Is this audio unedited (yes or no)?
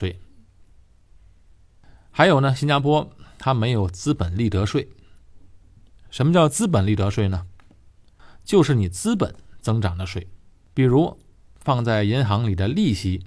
no